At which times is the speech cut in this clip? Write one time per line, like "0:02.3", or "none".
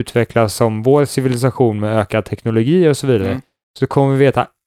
none